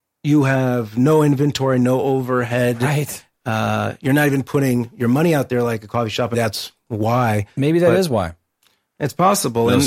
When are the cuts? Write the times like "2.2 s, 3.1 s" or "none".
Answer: 6.3 s